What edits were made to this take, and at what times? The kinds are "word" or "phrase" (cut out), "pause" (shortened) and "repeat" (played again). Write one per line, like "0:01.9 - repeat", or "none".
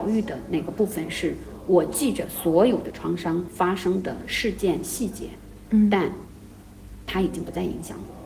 none